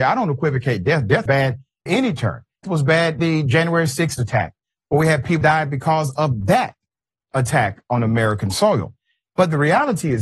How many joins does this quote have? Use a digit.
6